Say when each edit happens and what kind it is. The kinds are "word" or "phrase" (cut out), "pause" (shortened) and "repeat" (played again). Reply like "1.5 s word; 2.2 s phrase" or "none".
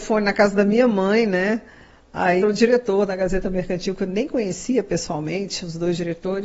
2.4 s word